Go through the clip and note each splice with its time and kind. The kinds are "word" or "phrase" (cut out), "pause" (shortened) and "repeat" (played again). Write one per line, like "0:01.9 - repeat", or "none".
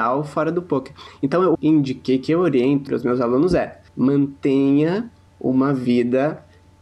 0:01.5 - phrase
0:02.9 - word
0:03.9 - pause